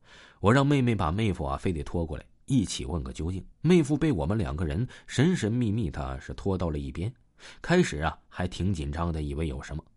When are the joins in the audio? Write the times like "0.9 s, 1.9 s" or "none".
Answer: 3.5 s